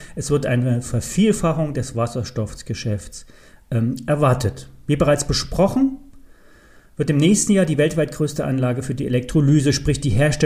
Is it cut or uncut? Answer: uncut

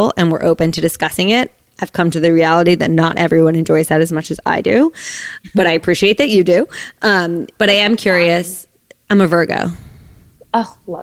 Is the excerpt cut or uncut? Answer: uncut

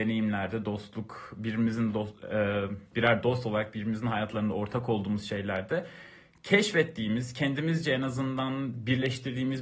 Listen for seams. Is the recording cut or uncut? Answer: uncut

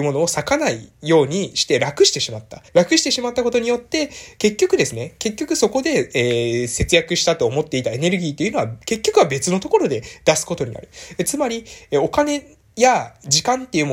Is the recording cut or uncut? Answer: cut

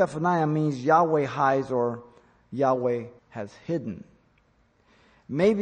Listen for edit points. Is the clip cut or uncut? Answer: cut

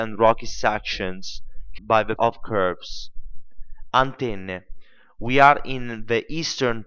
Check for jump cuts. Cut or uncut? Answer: cut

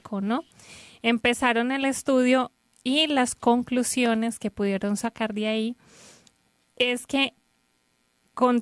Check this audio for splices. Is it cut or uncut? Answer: uncut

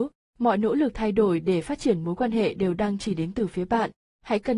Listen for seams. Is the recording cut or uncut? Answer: uncut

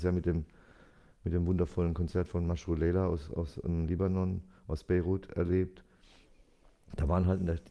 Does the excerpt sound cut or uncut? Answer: uncut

